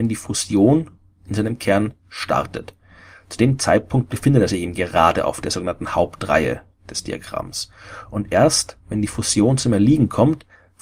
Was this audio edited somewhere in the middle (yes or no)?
no